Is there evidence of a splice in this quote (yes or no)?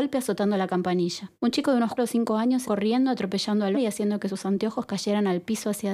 yes